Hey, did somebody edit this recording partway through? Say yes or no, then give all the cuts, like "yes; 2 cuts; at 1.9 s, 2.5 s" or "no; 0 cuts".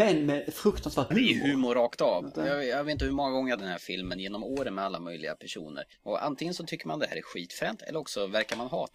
yes; 3 cuts; at 1.1 s, 3.6 s, 5.9 s